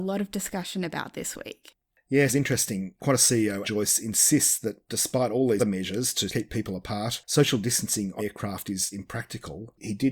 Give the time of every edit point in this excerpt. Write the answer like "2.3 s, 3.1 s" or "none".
1.1 s, 2.3 s, 3.6 s, 5.6 s, 6.3 s, 8.2 s, 8.9 s